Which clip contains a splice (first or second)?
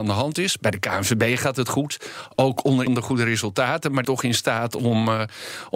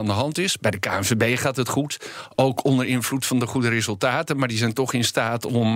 first